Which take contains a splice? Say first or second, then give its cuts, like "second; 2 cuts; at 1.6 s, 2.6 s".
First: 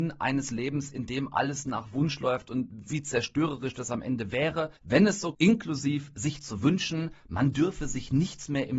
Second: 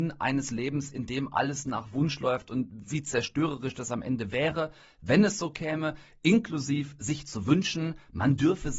first; 2 cuts; at 4.8 s, 5.3 s